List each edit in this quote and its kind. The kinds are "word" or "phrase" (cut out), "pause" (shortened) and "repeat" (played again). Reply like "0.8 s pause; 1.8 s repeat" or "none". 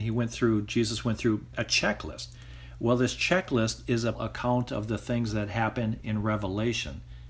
1.5 s word; 4.1 s word